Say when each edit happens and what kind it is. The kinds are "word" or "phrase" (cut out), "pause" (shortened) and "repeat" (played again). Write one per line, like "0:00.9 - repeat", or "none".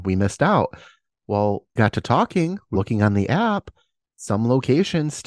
0:01.8 - word
0:02.7 - word